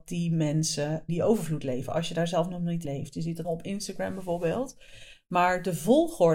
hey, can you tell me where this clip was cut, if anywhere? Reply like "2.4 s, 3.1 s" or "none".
1.1 s, 2.8 s, 3.4 s